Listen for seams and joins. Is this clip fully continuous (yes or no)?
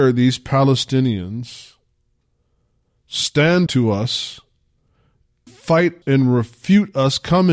no